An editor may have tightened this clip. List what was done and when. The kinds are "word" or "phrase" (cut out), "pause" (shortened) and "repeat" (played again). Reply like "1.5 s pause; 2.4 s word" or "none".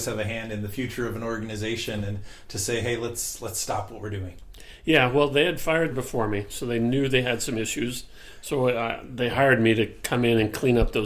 5.9 s phrase

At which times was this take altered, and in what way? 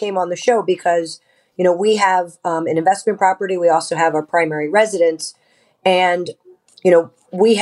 none

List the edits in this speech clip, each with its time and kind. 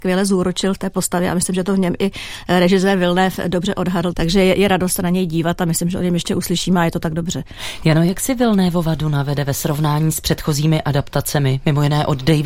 4.1 s word

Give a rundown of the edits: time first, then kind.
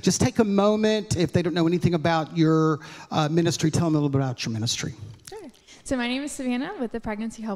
none

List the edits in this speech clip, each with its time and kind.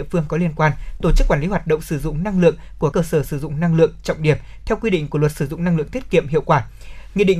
2.9 s word

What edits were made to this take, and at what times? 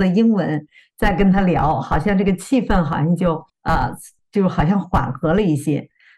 3.5 s pause

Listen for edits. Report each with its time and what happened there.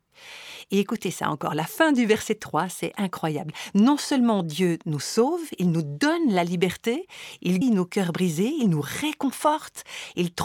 7.6 s word

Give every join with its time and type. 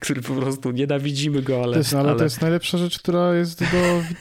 1.9 s word

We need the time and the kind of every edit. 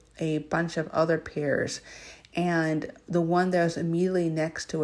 none

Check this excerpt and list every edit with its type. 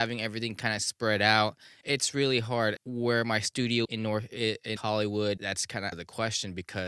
1.8 s word; 2.8 s word; 3.8 s word; 4.8 s word; 5.4 s word; 5.9 s word

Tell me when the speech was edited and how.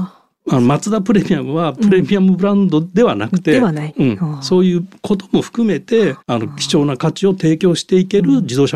6.2 s pause

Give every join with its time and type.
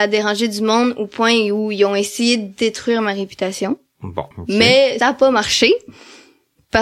4.3 s pause; 5.0 s word

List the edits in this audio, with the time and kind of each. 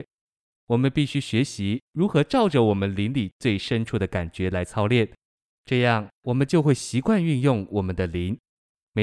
none

